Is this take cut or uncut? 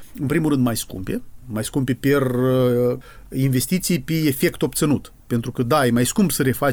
uncut